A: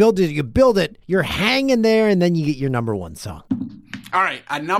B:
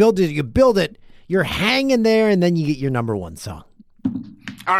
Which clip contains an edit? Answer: A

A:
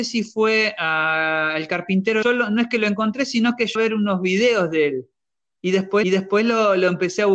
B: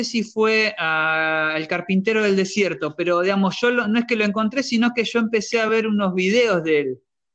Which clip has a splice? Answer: A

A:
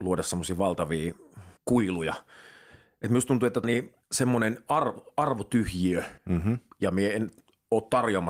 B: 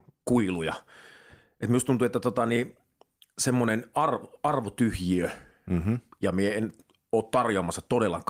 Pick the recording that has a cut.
A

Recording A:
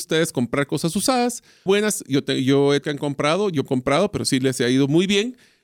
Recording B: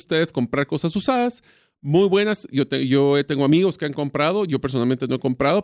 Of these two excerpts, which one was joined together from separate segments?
A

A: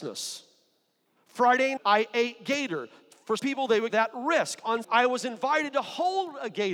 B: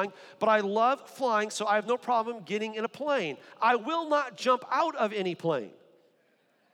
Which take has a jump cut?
A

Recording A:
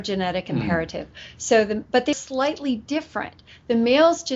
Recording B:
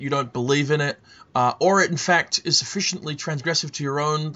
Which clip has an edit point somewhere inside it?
A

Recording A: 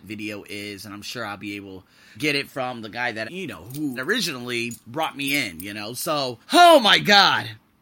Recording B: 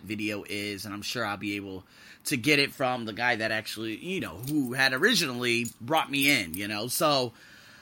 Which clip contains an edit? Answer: A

